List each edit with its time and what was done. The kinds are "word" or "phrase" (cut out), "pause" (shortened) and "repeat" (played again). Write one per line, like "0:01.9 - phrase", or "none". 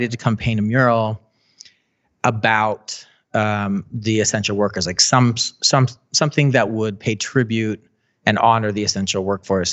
none